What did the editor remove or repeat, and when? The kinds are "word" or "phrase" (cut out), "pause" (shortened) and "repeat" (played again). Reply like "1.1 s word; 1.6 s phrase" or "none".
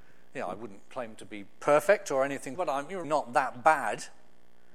2.5 s word; 3.0 s word

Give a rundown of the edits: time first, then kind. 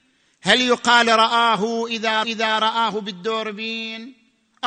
2.2 s repeat

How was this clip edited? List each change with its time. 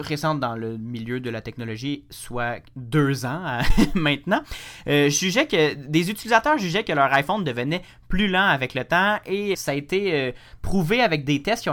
9.5 s word

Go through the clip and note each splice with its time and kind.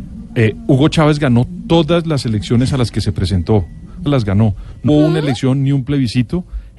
4.1 s phrase; 4.9 s word

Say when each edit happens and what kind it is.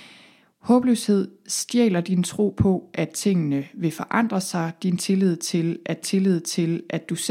6.0 s repeat

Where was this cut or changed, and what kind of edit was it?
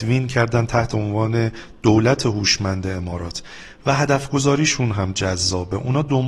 none

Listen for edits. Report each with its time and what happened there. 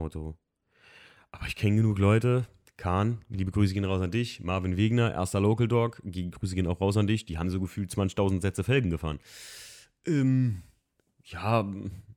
none

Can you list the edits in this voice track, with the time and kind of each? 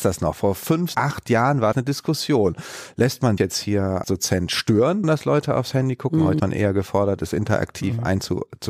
0.9 s word; 1.7 s word; 3.4 s word; 4.0 s word; 5.0 s word; 6.4 s word

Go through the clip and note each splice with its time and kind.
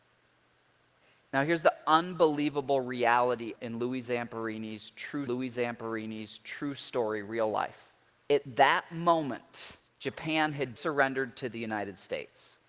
3.6 s phrase; 5.3 s repeat; 8.1 s pause; 9.9 s pause; 10.8 s word

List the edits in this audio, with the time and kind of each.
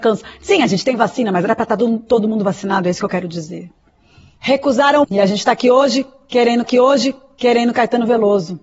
5.0 s word; 6.6 s repeat

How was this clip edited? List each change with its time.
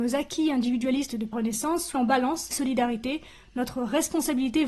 1.3 s word; 1.9 s word; 2.5 s phrase

